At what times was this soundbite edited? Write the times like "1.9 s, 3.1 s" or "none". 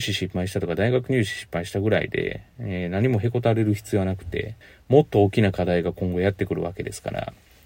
4.6 s